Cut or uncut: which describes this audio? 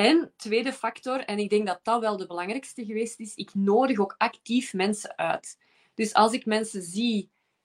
uncut